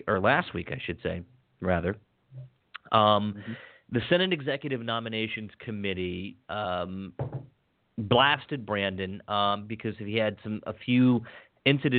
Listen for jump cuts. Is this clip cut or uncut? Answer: uncut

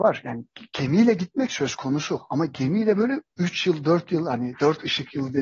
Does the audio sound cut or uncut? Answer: cut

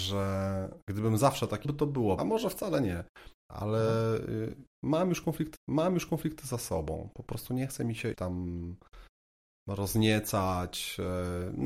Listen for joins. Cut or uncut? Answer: cut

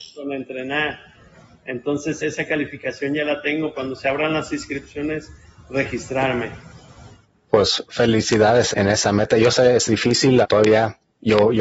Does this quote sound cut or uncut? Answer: cut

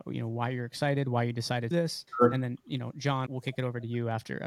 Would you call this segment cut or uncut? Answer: cut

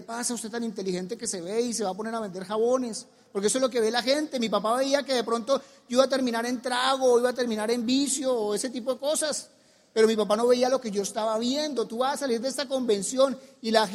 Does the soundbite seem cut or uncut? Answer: uncut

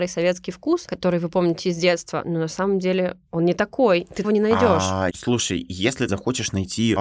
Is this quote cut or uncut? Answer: cut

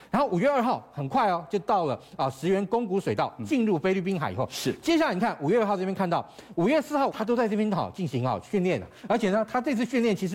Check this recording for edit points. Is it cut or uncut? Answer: cut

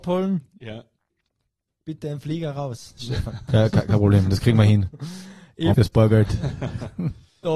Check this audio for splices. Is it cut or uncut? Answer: cut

